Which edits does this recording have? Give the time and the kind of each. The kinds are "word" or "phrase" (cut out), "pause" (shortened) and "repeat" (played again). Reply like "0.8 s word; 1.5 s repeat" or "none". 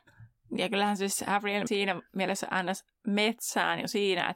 1.7 s word